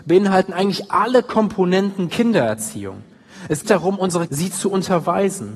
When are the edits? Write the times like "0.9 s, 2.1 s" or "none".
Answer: 2.1 s, 3.6 s, 4.3 s